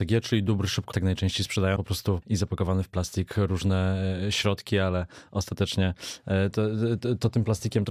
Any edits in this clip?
yes; 4 cuts; at 0.9 s, 1.8 s, 2.2 s, 6.5 s

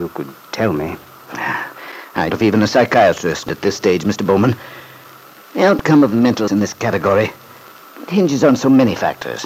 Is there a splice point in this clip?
yes; 4 cuts; at 2.3 s, 3.5 s, 6.5 s, 8.1 s

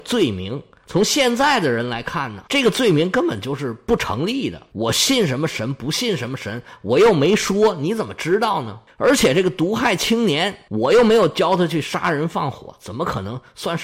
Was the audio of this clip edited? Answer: yes; 1 cut; at 2.5 s

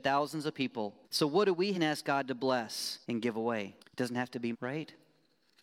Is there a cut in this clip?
yes; 5 cuts; at 1.0 s, 1.7 s, 3.0 s, 3.8 s, 4.5 s

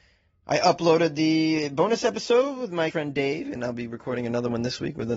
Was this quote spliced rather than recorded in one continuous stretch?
yes; 1 cut; at 2.9 s

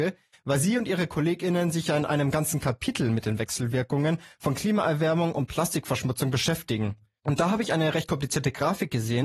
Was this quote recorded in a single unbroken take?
yes; 0 cuts

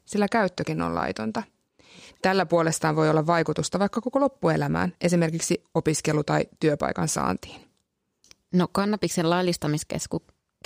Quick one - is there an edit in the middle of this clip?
no; 0 cuts

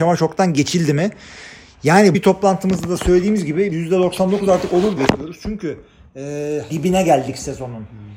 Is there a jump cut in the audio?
yes; 4 cuts; at 2.1 s, 3.7 s, 5.0 s, 6.7 s

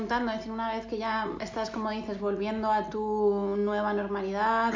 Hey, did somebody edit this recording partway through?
yes; 1 cut; at 1.4 s

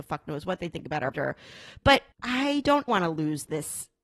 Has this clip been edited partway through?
yes; 3 cuts; at 1.1 s, 2.1 s, 2.9 s

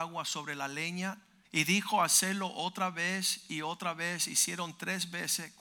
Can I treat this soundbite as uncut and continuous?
no; 1 cut; at 1.4 s

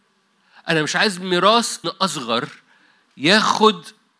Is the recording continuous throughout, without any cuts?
no; 1 cut; at 1.8 s

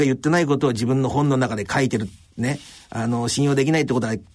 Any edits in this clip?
no; 0 cuts

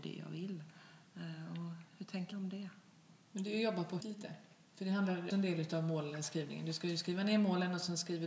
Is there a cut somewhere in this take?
yes; 5 cuts; at 1.1 s, 2.3 s, 3.2 s, 4.0 s, 5.3 s

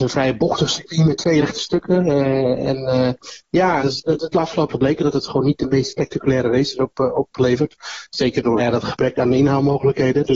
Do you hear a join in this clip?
yes; 4 cuts; at 1.4 s, 3.8 s, 4.7 s, 8.6 s

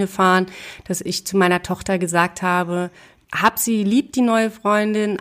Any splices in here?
no; 0 cuts

